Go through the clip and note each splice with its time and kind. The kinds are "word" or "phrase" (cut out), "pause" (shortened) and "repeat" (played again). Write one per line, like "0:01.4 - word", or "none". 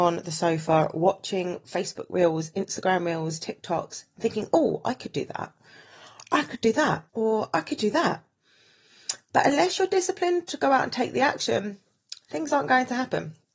0:07.1 - pause

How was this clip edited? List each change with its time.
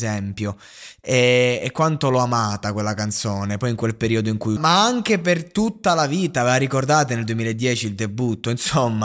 0:04.6 - phrase

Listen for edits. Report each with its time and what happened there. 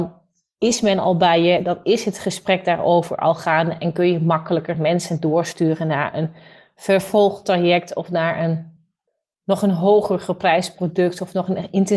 none

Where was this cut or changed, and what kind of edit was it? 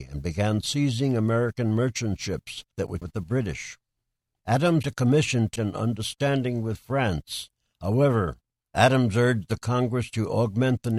0:03.0 - word
0:04.8 - word
0:05.6 - word

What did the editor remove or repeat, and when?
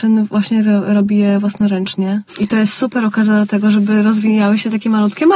0:02.3 - pause

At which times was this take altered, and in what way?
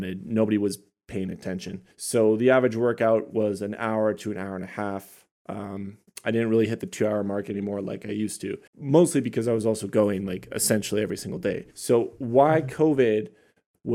0:01.9 - pause
0:08.7 - pause
0:11.7 - pause

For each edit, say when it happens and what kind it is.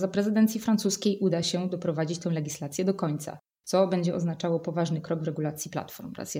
none

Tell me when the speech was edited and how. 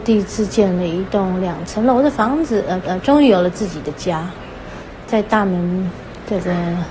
0:02.8 - repeat

